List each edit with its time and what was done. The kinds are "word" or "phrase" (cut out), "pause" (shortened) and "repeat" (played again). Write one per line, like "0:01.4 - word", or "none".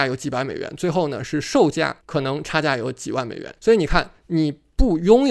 0:02.0 - pause
0:03.6 - pause